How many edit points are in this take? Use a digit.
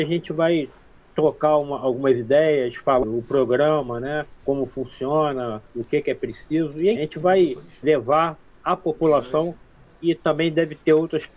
4